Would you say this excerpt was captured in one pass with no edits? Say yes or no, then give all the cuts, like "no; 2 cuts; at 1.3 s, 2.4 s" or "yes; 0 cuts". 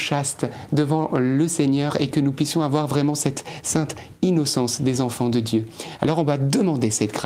yes; 0 cuts